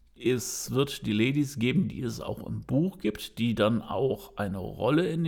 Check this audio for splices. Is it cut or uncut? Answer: uncut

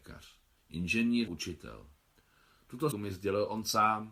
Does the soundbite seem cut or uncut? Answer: cut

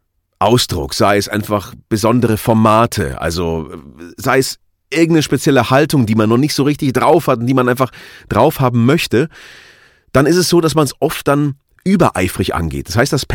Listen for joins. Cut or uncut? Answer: uncut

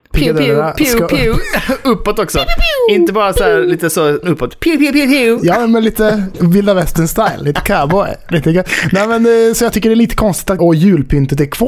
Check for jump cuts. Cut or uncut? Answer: cut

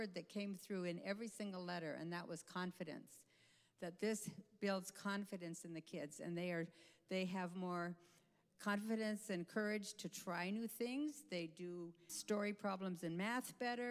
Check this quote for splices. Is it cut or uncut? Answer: cut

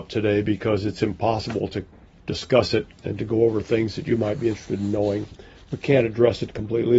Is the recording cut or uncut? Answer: uncut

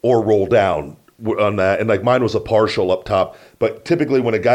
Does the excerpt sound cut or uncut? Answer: uncut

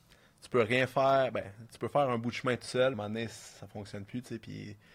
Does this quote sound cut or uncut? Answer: cut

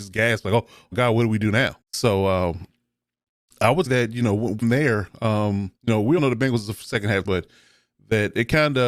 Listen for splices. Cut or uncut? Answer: cut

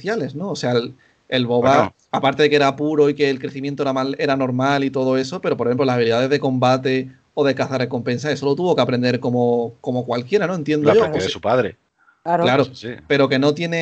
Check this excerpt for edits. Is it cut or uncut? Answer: uncut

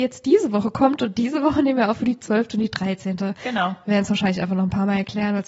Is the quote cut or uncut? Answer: uncut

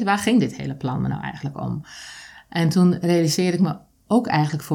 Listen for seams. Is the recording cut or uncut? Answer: uncut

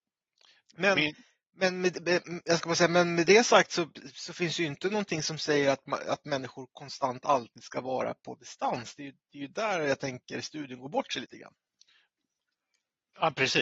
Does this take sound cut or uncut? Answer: uncut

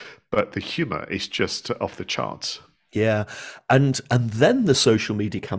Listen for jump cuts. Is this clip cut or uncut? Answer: uncut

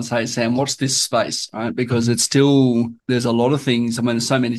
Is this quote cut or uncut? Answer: cut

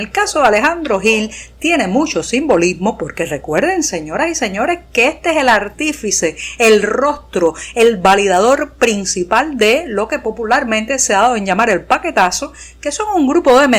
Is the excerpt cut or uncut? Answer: uncut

